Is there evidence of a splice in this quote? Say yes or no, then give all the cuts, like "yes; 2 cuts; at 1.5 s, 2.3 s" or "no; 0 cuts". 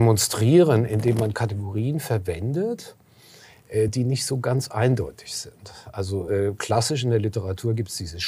no; 0 cuts